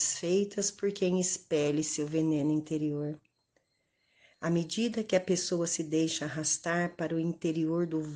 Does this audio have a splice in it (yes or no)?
no